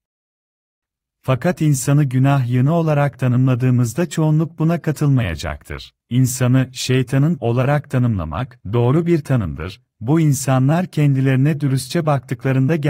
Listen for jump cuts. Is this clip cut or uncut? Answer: cut